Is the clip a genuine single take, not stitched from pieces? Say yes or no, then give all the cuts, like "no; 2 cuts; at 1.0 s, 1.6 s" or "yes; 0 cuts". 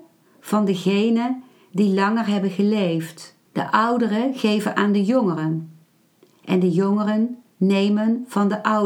no; 1 cut; at 3.5 s